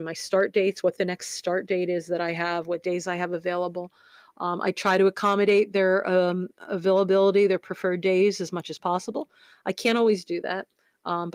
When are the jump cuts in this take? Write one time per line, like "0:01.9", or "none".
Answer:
none